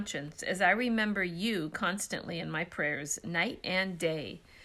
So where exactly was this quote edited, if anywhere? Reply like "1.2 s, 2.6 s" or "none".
none